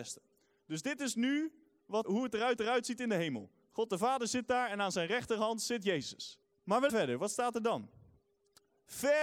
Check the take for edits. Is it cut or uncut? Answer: cut